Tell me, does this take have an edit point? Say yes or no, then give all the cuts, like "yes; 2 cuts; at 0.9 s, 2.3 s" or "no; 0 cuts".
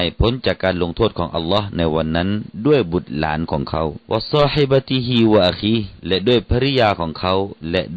yes; 2 cuts; at 4.0 s, 6.0 s